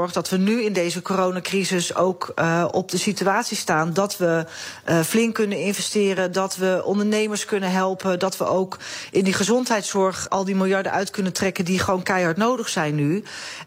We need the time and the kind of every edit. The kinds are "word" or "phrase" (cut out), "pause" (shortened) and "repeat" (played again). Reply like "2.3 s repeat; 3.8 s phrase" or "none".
10.3 s word